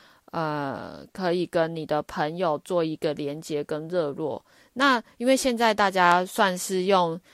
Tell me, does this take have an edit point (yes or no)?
no